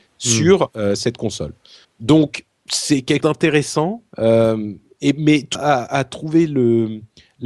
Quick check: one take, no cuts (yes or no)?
no